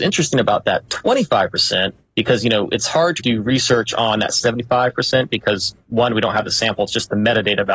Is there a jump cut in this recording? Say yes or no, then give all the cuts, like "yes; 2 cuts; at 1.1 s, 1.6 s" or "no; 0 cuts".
yes; 1 cut; at 3.2 s